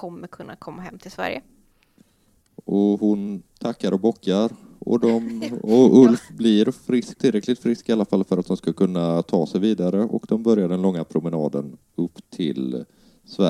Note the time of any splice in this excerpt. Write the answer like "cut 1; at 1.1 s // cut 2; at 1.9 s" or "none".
cut 1; at 7.1 s